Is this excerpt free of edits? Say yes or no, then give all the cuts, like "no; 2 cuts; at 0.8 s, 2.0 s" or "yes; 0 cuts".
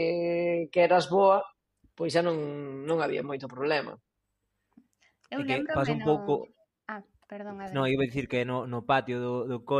yes; 0 cuts